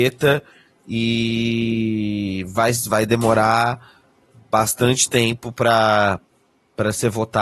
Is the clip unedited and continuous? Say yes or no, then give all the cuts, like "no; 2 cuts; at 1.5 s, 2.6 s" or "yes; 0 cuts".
yes; 0 cuts